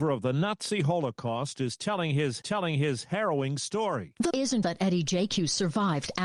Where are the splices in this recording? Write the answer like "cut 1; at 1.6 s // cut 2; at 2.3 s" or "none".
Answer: cut 1; at 2.4 s // cut 2; at 4.3 s // cut 3; at 4.6 s